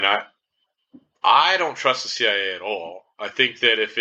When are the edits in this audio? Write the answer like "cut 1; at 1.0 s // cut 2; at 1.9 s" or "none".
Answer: none